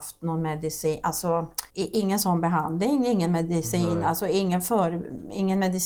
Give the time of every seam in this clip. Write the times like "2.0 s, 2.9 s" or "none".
1.7 s